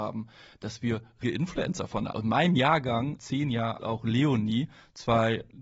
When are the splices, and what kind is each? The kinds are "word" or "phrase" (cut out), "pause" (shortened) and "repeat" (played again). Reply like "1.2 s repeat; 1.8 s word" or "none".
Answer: 1.2 s word; 2.1 s word; 3.2 s word; 3.8 s word